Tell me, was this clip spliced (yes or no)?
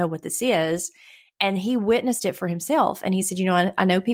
no